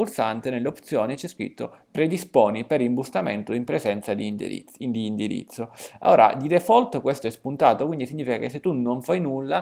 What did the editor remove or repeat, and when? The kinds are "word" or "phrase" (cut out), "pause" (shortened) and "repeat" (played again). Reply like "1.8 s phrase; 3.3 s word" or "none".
none